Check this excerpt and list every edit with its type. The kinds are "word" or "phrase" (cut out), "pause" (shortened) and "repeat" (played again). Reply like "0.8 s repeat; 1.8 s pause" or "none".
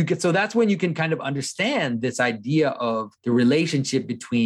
3.2 s pause

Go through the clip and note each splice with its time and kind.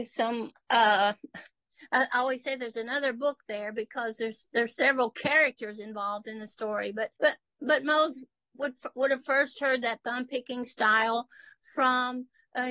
7.2 s pause

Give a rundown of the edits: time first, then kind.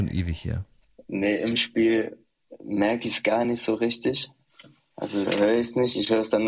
none

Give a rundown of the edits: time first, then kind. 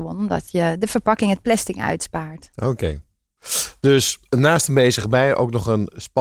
none

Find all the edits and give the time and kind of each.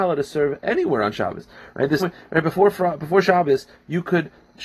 2.0 s word

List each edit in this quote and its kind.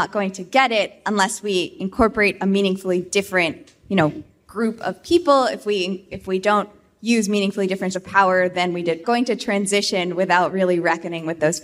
7.9 s word; 9.0 s phrase

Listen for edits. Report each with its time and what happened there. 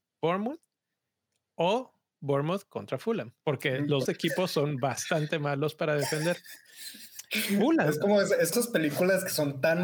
3.4 s pause; 4.1 s word; 8.5 s word

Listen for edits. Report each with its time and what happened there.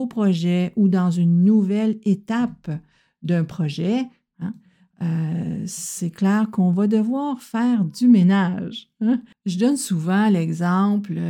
none

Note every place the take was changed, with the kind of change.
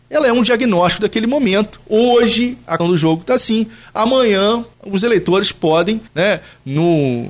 2.8 s word; 4.7 s pause; 6.1 s pause

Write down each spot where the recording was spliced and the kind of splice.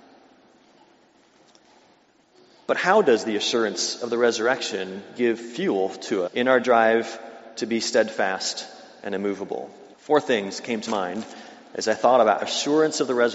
6.3 s word; 9.9 s pause; 10.9 s word; 12.4 s word

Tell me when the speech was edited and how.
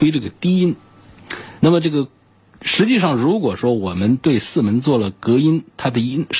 1.6 s pause

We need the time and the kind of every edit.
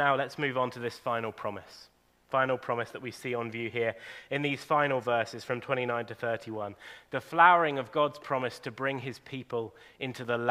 none

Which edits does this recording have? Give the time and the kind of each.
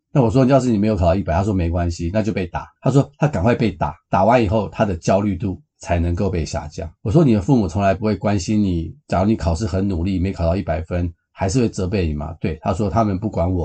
2.8 s pause; 7.0 s pause; 9.0 s pause

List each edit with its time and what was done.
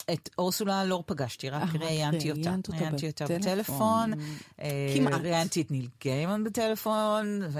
none

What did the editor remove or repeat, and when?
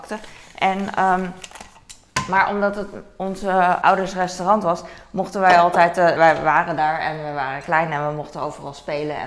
3.8 s word; 6.2 s word

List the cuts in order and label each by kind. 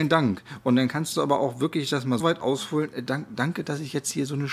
2.2 s word

